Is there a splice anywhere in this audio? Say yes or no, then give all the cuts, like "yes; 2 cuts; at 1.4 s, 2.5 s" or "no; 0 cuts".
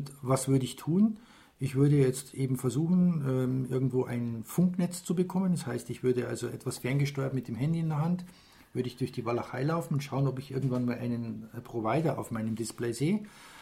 no; 0 cuts